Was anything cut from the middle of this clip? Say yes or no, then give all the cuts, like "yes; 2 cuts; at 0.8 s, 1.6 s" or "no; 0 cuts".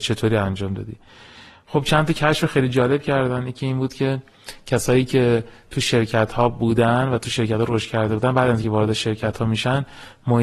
no; 0 cuts